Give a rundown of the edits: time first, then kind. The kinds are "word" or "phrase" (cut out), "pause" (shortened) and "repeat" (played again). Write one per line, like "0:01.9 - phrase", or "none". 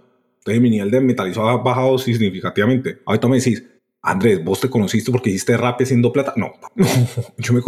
0:03.8 - pause